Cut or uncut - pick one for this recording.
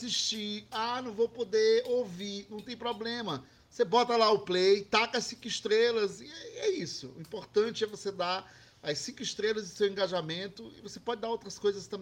uncut